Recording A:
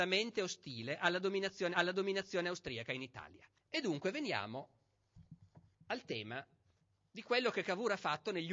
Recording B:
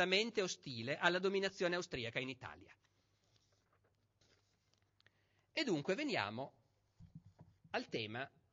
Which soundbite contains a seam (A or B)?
A